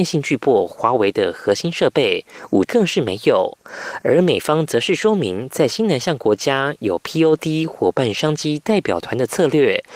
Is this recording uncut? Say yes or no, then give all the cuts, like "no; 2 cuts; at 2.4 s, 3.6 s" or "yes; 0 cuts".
no; 1 cut; at 2.6 s